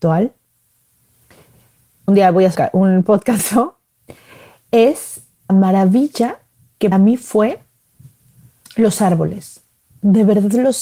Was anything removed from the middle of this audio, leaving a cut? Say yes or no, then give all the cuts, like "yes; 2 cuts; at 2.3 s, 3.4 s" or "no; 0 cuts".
yes; 5 cuts; at 2.1 s, 2.5 s, 3.4 s, 5.5 s, 6.9 s